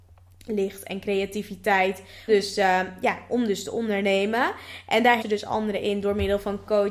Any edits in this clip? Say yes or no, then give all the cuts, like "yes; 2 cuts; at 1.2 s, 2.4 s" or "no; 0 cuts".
yes; 2 cuts; at 2.3 s, 5.2 s